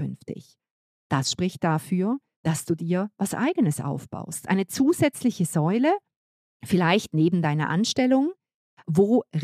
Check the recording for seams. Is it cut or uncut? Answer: uncut